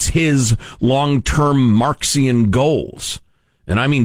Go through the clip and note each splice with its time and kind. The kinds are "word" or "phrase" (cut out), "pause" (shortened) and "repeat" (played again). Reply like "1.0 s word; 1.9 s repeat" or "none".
none